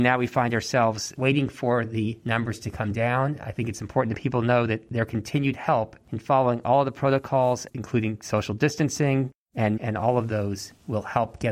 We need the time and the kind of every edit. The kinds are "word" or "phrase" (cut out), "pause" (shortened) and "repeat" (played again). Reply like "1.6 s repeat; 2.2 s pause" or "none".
1.1 s word; 7.7 s phrase; 9.8 s word